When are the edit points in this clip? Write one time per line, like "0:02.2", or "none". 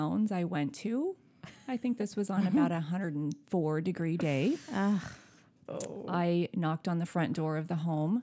none